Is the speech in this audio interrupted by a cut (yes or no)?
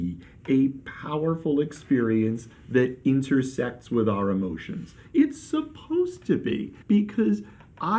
yes